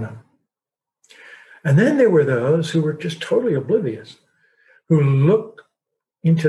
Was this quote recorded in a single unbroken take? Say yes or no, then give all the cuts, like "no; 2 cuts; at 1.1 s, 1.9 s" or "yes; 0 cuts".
yes; 0 cuts